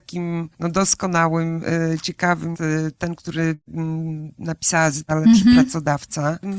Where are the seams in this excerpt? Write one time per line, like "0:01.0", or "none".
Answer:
0:02.5
0:05.1